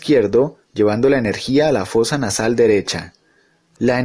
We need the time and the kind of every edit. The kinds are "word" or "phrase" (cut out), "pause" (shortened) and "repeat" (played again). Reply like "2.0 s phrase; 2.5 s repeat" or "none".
none